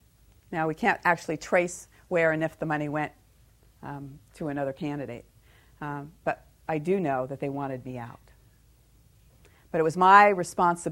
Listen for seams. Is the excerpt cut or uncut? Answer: uncut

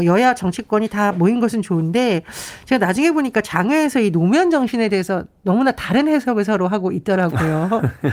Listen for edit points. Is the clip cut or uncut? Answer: uncut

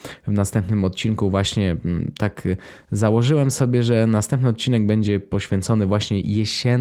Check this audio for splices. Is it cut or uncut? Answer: uncut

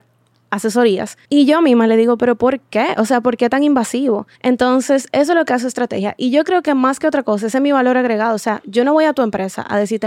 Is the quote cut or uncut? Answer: cut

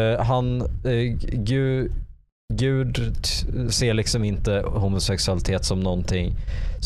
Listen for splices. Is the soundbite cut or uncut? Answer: uncut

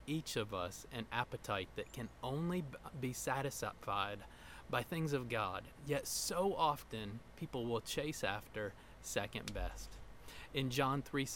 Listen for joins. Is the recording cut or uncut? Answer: uncut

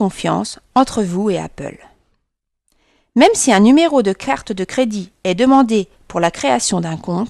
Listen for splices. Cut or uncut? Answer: uncut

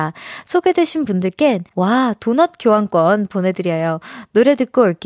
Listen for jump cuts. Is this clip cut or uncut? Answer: cut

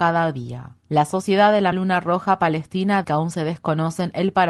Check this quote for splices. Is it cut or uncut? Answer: cut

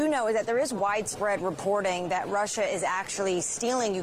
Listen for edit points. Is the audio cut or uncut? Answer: uncut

